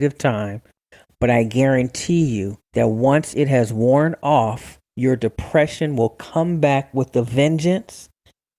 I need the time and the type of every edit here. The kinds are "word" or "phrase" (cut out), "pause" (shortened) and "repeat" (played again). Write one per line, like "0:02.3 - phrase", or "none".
0:02.6 - pause
0:04.8 - pause

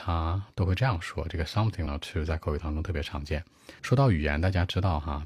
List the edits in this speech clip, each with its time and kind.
0:01.9 - word
0:03.8 - pause

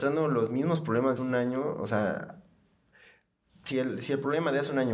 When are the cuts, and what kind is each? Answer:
0:01.2 - word
0:03.7 - phrase

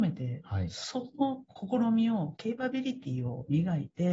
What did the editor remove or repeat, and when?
0:01.5 - pause

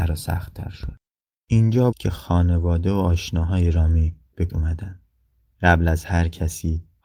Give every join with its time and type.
0:01.9 - word
0:04.5 - word

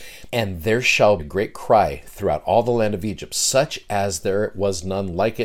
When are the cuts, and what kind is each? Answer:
0:01.2 - word

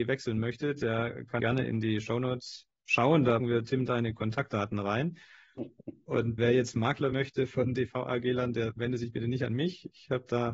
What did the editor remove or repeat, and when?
0:01.4 - word
0:03.4 - word
0:06.4 - word
0:07.1 - word
0:07.7 - word

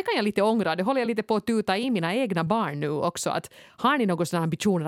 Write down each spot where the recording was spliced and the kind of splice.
none

